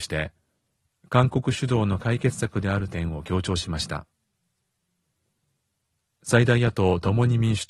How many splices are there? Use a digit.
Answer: 0